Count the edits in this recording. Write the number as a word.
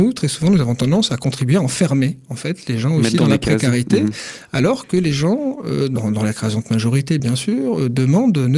zero